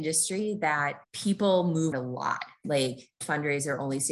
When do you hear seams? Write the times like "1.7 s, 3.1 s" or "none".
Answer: 1.0 s, 1.9 s, 3.2 s